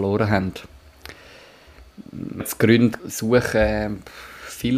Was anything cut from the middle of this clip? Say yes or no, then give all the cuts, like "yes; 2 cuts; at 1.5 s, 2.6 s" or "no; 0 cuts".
yes; 2 cuts; at 2.4 s, 3.0 s